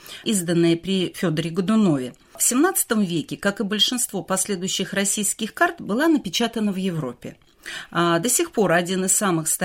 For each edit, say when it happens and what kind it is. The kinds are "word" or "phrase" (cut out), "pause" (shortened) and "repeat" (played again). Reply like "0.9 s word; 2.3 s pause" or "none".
none